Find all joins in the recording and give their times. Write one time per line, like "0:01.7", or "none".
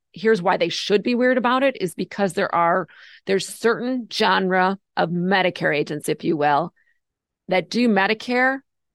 none